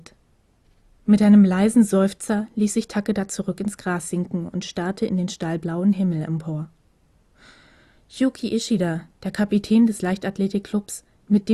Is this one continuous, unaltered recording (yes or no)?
yes